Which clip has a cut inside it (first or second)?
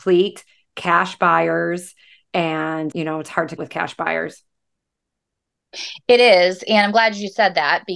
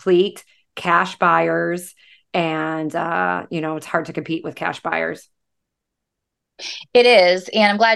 first